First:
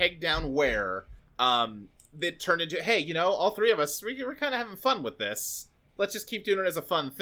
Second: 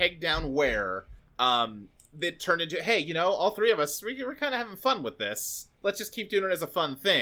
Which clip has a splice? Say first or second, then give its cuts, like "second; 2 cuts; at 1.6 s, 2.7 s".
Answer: second; 1 cut; at 5.7 s